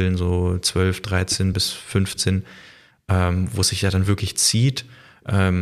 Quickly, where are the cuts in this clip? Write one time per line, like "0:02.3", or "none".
none